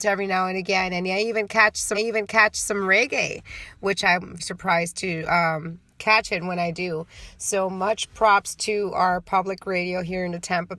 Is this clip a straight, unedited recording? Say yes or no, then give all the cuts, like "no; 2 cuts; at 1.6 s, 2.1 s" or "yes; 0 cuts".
no; 2 cuts; at 1.9 s, 4.4 s